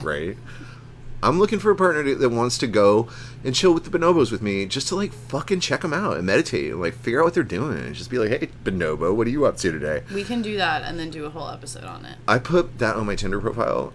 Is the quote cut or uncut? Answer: uncut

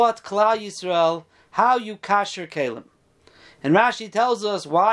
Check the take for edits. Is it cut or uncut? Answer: uncut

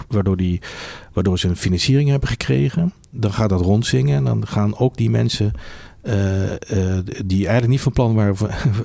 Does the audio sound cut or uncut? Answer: uncut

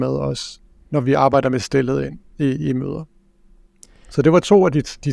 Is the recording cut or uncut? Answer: uncut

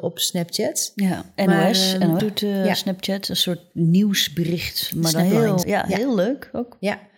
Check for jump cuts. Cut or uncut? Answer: cut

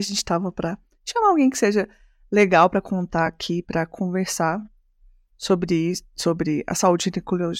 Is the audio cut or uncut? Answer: uncut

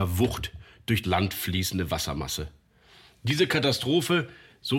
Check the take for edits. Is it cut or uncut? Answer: cut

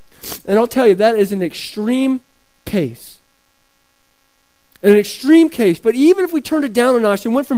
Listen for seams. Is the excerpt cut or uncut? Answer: uncut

